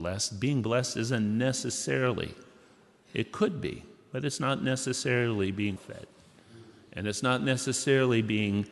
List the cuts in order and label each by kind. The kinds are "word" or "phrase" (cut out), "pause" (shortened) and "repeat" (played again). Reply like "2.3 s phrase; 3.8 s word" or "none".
5.8 s word